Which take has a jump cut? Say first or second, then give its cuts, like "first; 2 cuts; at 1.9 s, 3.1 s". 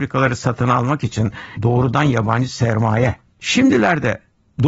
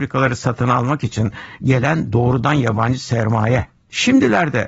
first; 1 cut; at 1.6 s